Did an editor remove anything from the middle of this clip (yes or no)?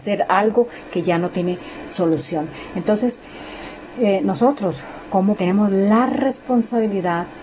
yes